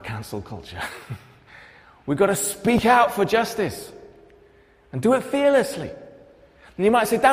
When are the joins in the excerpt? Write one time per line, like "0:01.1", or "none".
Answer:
none

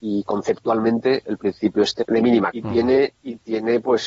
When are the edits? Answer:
0:01.2
0:02.0
0:02.5

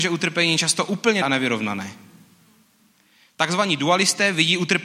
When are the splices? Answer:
0:01.2

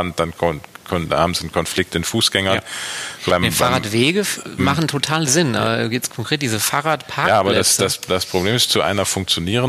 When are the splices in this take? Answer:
0:01.9
0:03.3
0:04.6

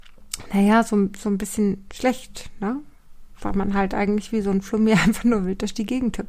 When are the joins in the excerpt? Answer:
0:03.3

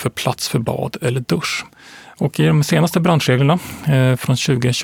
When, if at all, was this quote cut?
none

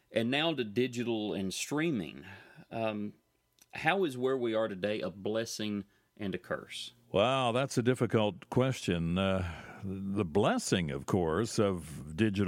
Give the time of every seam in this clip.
none

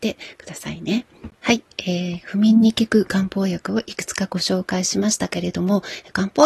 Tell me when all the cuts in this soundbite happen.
0:01.3

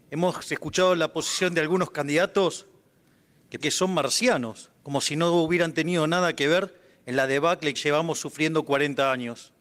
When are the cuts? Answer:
0:03.6
0:04.8
0:07.7

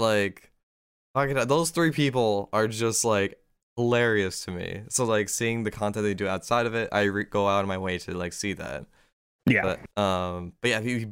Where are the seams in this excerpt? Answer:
0:09.9

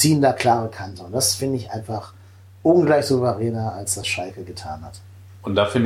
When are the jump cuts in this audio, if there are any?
none

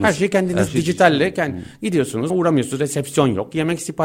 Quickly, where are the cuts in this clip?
0:02.3

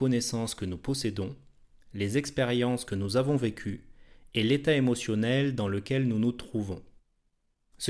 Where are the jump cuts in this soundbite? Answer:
none

